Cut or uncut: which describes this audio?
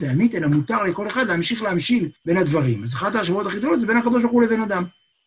cut